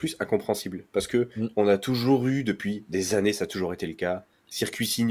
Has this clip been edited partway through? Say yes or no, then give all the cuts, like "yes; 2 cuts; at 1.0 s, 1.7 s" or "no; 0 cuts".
no; 0 cuts